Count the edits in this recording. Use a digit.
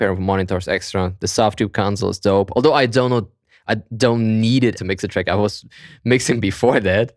1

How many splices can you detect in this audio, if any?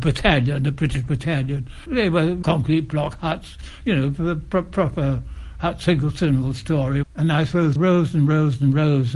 1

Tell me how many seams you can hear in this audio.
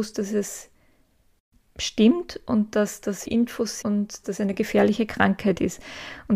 3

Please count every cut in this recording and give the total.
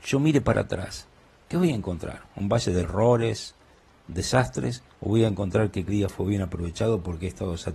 3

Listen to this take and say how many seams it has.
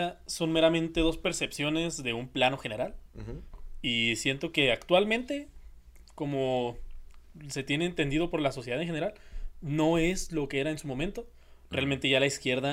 0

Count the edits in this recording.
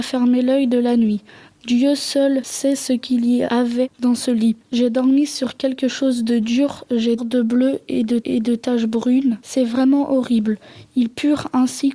2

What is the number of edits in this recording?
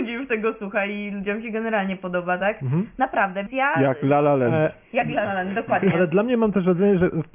1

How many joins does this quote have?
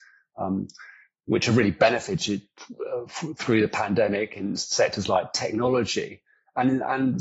0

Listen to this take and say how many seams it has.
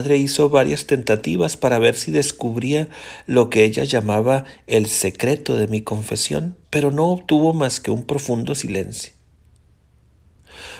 1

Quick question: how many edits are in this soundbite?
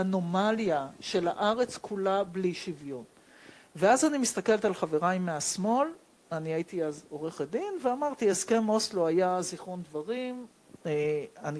0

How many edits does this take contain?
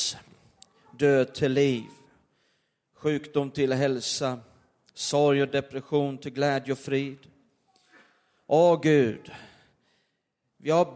0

